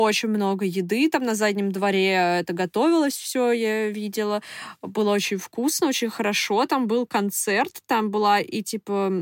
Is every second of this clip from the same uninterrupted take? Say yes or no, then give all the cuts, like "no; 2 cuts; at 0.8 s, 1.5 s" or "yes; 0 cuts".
yes; 0 cuts